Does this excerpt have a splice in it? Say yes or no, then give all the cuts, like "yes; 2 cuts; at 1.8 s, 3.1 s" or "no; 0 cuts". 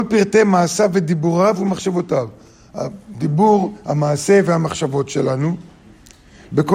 no; 0 cuts